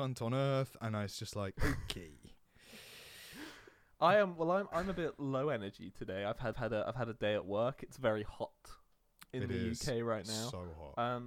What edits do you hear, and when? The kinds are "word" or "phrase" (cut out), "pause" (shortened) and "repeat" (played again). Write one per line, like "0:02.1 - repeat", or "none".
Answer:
0:06.5 - repeat